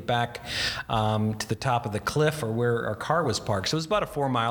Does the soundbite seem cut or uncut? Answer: uncut